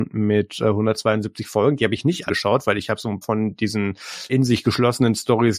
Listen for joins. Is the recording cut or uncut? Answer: cut